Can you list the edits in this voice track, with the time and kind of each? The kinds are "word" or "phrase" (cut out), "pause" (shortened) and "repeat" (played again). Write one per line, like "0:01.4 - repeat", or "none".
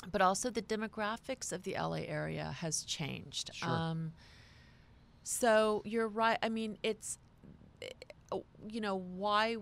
none